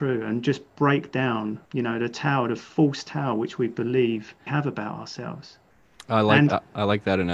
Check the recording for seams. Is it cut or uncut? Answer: cut